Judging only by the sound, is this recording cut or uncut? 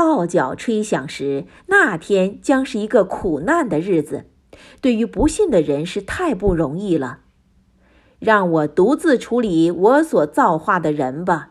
uncut